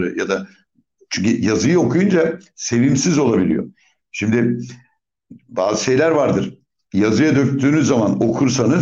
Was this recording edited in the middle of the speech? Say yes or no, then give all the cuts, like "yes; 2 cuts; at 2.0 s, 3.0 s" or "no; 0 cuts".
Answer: no; 0 cuts